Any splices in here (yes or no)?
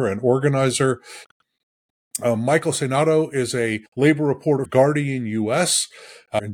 yes